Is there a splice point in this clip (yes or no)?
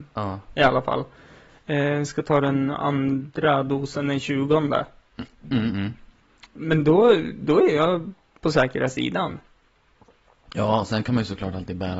no